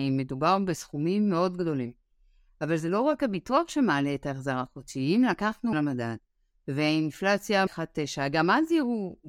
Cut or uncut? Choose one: cut